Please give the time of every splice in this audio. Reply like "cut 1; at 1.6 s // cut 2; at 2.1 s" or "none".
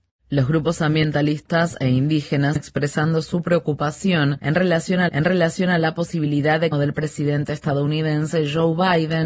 cut 1; at 2.6 s // cut 2; at 5.1 s // cut 3; at 6.7 s